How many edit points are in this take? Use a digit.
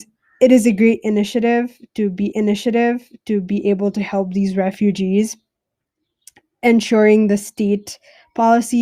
1